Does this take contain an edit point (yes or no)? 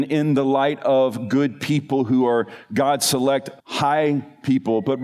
yes